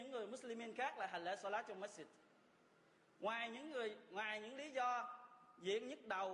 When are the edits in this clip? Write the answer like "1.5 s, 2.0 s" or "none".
none